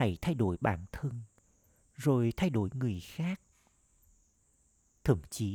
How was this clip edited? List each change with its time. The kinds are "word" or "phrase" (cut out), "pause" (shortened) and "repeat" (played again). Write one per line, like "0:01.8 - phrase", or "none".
none